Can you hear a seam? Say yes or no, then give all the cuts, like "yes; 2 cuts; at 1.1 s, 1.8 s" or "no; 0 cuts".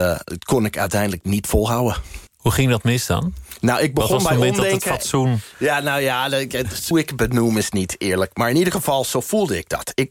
yes; 2 cuts; at 2.3 s, 6.9 s